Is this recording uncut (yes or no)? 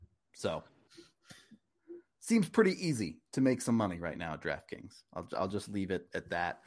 yes